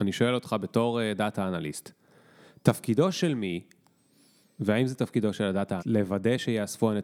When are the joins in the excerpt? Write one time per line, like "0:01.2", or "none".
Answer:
0:05.8

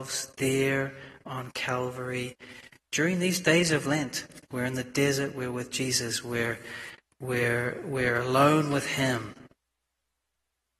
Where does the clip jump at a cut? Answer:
none

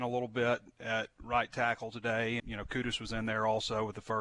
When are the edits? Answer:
0:02.4

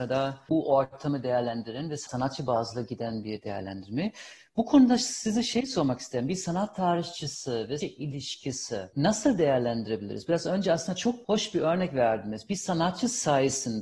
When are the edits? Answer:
0:07.8

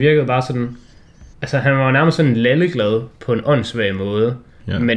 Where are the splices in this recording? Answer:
0:01.3

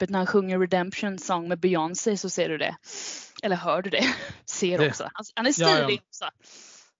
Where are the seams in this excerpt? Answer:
none

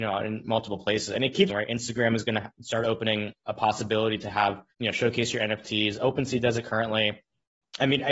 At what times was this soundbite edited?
0:01.5
0:03.4
0:04.7

